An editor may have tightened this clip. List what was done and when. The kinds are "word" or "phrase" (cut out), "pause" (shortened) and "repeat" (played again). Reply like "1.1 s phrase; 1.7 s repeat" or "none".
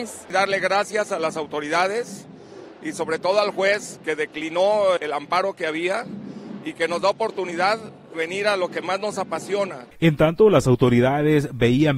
5.0 s word; 8.1 s word

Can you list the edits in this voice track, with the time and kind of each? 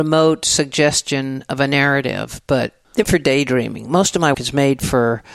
3.0 s word; 4.3 s word

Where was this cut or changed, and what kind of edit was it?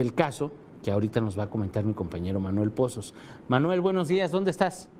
none

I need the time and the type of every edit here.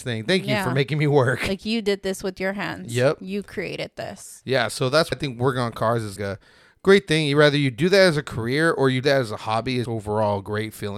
5.1 s word; 6.2 s word; 9.0 s word; 9.8 s word

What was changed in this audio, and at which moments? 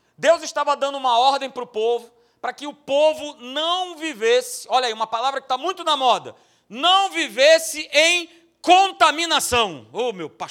none

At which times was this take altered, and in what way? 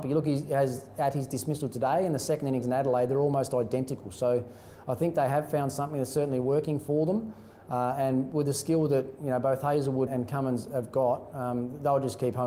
10.1 s word

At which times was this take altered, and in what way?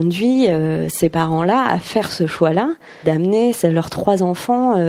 3.0 s word

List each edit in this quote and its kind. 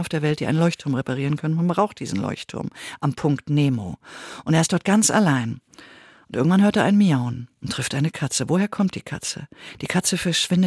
none

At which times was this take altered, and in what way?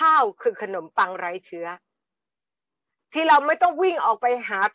none

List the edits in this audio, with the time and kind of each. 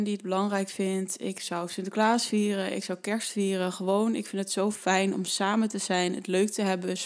none

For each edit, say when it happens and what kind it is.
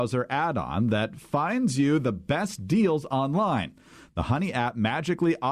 none

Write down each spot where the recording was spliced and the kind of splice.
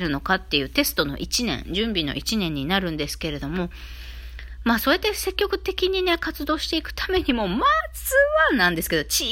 none

